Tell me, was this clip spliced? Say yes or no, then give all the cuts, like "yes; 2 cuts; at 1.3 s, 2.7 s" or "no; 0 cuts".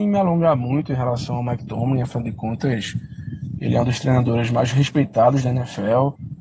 no; 0 cuts